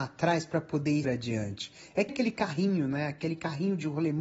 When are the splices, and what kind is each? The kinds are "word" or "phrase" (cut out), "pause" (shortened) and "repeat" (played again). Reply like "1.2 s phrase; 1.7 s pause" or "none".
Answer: 1.0 s word; 2.1 s word